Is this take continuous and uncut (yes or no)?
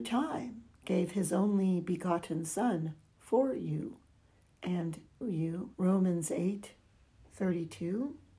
no